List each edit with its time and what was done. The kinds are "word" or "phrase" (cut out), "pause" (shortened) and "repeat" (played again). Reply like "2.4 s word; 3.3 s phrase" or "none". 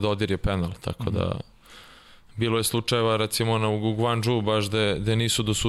none

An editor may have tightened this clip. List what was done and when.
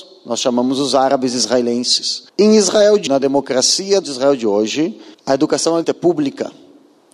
2.3 s pause; 3.1 s word; 4.0 s word; 5.1 s pause; 5.8 s word

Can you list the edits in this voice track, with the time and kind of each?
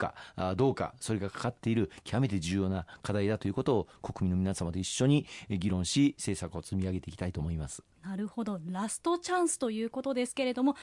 7.9 s pause

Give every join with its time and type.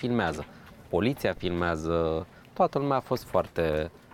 2.4 s pause

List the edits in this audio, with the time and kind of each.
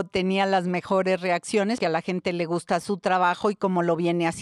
1.8 s word

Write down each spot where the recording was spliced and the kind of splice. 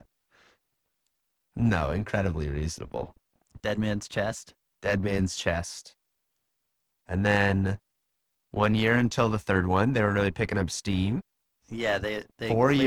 none

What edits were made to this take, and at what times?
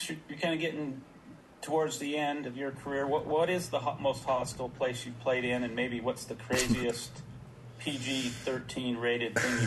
none

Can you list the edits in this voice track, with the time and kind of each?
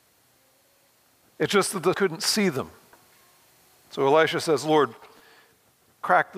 1.9 s word

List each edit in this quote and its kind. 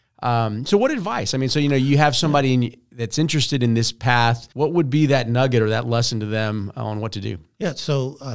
4.5 s pause

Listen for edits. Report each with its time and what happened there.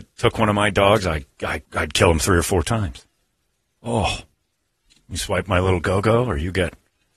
1.6 s pause; 3.5 s pause

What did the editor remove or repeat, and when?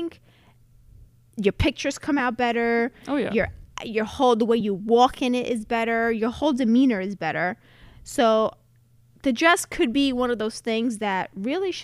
none

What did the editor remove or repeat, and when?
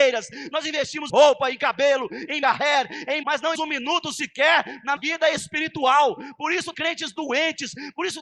1.1 s word; 2.4 s word; 3.2 s word; 3.5 s word; 5.0 s word; 6.7 s word

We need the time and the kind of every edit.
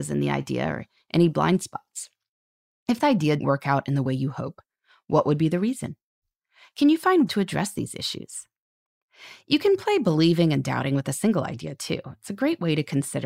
3.0 s word; 3.4 s word; 7.3 s word

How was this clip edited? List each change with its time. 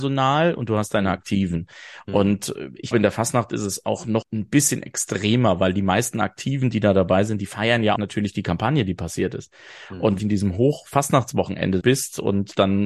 2.9 s word; 4.2 s word; 8.0 s word; 10.2 s phrase; 11.8 s phrase

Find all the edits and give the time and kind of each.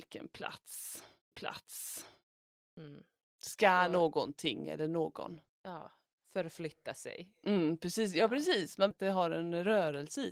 1.3 s repeat; 5.5 s pause; 8.9 s phrase

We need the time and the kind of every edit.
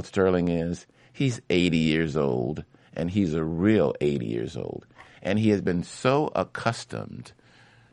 none

